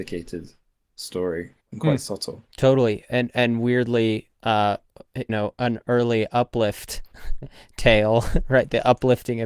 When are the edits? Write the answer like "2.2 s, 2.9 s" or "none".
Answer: 1.6 s, 5.3 s